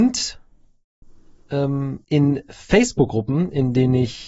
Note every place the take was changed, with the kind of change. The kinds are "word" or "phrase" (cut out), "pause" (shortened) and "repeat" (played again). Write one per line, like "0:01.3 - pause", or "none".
0:02.0 - pause